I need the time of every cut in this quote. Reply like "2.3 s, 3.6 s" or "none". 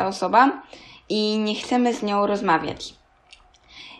none